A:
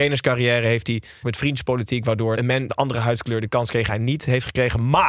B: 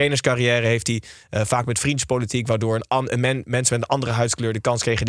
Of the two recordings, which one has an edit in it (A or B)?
A